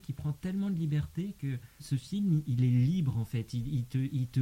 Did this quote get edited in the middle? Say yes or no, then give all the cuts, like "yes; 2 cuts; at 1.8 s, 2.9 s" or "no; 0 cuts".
yes; 1 cut; at 1.8 s